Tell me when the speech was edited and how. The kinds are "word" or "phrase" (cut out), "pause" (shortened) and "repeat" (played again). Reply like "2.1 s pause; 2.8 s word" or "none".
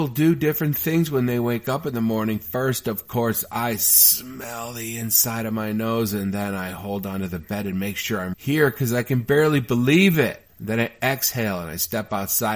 8.3 s word; 10.5 s pause